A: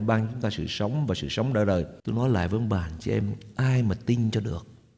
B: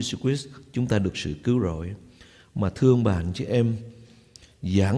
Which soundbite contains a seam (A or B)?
A